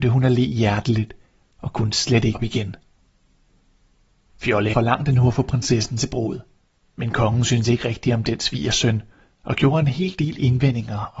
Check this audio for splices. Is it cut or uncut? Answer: cut